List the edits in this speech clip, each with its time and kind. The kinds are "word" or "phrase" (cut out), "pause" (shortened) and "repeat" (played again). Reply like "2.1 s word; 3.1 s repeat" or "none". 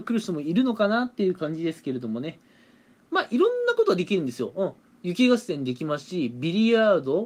none